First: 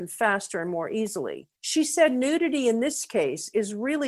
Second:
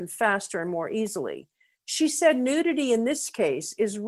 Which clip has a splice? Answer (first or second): first